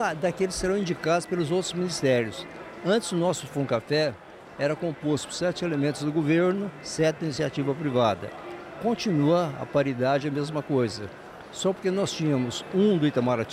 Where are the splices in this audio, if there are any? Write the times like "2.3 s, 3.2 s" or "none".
none